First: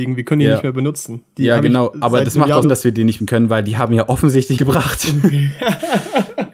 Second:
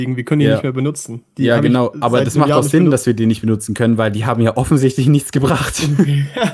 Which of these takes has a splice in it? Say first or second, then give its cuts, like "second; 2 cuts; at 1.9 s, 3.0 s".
first; 3 cuts; at 2.6 s, 3.2 s, 4.6 s